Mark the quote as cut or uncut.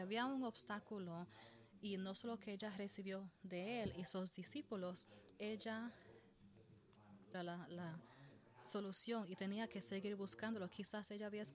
cut